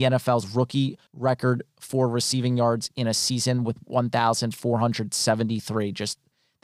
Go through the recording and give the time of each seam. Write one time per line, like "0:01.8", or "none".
0:01.1